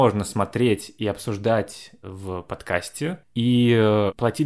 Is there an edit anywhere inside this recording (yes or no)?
yes